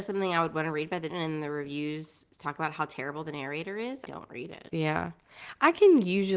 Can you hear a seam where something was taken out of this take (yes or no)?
yes